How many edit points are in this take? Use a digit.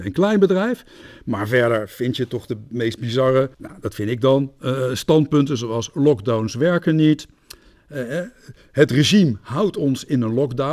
1